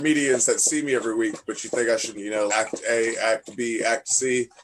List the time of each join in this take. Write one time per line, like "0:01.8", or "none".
0:02.1
0:02.5